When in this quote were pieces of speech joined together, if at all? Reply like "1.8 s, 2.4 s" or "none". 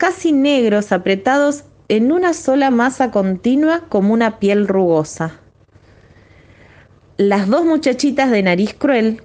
none